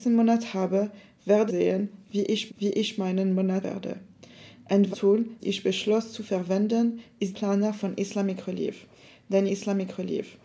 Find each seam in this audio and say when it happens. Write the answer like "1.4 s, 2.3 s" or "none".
1.5 s, 2.5 s, 3.6 s, 4.9 s, 5.4 s, 7.3 s, 9.5 s